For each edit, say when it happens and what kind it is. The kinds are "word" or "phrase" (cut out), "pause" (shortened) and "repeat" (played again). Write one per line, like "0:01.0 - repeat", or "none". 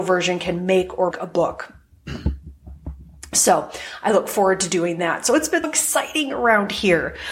0:01.1 - word
0:05.6 - word

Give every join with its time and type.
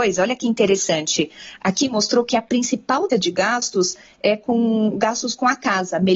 0:03.1 - word

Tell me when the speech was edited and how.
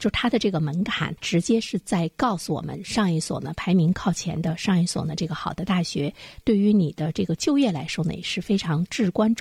0:01.2 - pause

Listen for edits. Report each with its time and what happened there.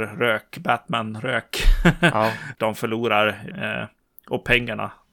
0:02.6 - word
0:03.5 - word

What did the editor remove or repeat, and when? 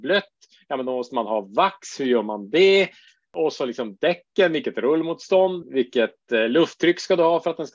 0:05.6 - word

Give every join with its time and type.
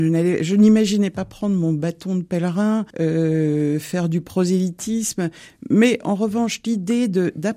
0:02.9 - pause

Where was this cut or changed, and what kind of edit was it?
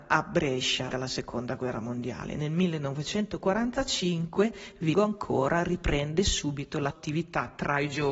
0:00.9 - word
0:04.9 - word
0:06.9 - word

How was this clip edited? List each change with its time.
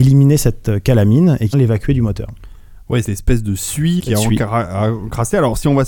0:01.5 - word
0:03.0 - word
0:04.0 - word

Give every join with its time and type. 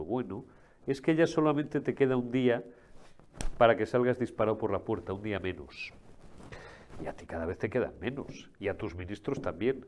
none

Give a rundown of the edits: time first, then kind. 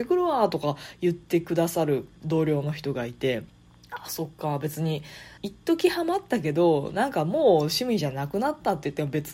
0:02.2 - pause
0:03.5 - pause
0:05.4 - pause

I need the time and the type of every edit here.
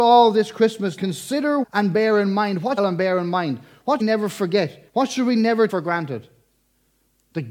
0:01.0 - word
0:01.6 - word
0:02.8 - phrase
0:04.0 - phrase
0:04.9 - pause
0:05.7 - word

